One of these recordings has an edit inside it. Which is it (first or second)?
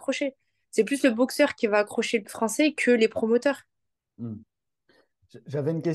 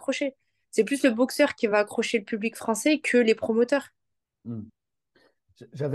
first